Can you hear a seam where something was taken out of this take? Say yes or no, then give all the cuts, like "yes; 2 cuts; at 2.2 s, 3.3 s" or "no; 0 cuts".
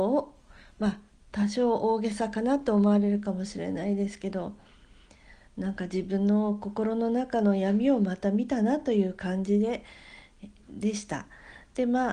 no; 0 cuts